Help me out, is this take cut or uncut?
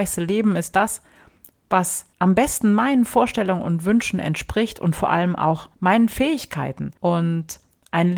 cut